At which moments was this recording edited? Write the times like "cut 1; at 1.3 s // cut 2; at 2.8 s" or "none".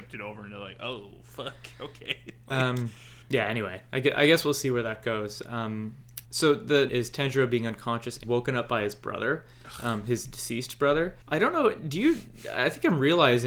cut 1; at 3.2 s // cut 2; at 6.2 s // cut 3; at 6.9 s // cut 4; at 8.2 s // cut 5; at 11.2 s